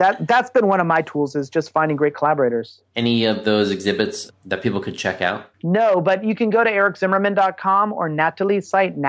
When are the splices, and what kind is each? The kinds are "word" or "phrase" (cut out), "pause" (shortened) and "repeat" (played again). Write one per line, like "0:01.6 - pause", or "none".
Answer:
0:05.5 - pause